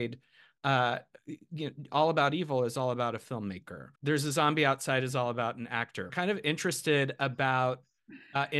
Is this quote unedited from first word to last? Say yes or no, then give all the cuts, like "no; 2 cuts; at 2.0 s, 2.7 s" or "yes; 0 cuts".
no; 2 cuts; at 4.0 s, 6.1 s